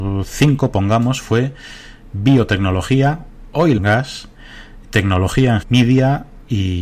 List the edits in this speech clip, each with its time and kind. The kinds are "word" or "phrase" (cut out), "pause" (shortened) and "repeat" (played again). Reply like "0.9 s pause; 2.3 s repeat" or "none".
3.8 s word; 4.8 s word; 5.6 s word